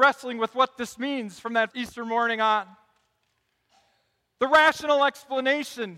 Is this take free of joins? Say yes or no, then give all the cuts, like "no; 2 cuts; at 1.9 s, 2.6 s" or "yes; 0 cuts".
no; 1 cut; at 1.7 s